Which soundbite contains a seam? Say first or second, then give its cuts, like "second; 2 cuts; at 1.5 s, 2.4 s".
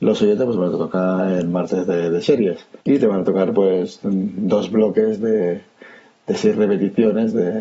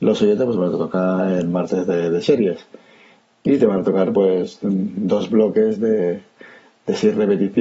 first; 1 cut; at 2.8 s